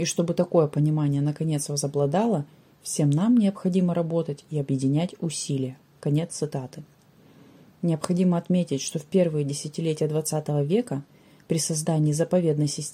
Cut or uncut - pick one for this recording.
uncut